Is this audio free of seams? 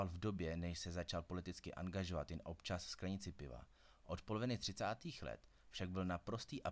yes; 0 cuts

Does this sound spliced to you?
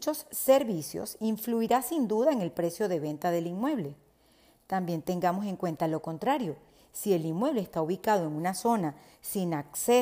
no; 0 cuts

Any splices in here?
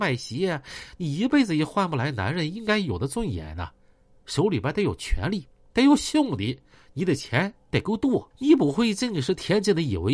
yes; 1 cut; at 8.3 s

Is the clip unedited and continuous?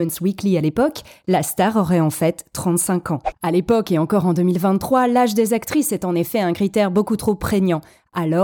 yes; 0 cuts

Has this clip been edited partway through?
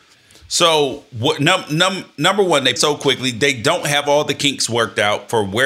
yes; 1 cut; at 2.8 s

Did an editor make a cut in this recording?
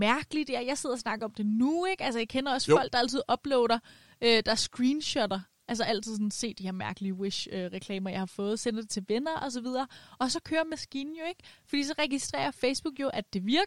no; 0 cuts

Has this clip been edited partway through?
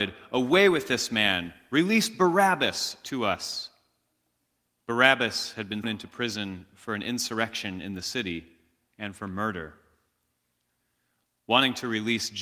yes; 1 cut; at 5.8 s

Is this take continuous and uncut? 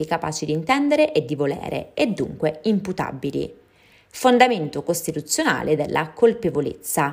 yes; 0 cuts

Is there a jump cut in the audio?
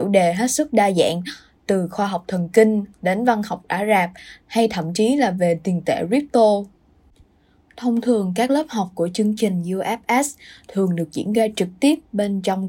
no; 0 cuts

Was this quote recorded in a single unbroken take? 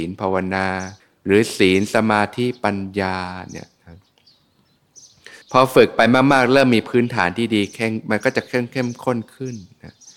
no; 2 cuts; at 1.0 s, 5.4 s

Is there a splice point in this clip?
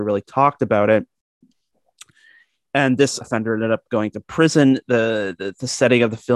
yes; 1 cut; at 3.2 s

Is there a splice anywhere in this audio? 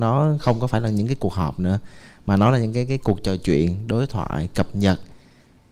no; 0 cuts

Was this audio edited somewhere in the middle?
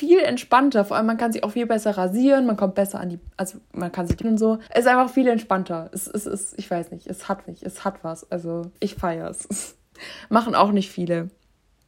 yes; 4 cuts; at 4.2 s, 4.7 s, 7.5 s, 8.8 s

